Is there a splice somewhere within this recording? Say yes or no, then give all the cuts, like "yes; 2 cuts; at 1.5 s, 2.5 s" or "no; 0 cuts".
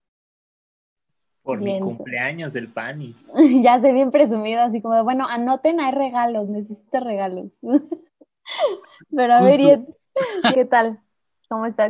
yes; 2 cuts; at 8.1 s, 10.5 s